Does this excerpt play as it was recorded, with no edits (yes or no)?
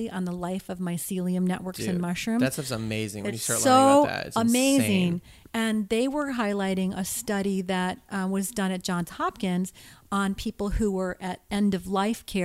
yes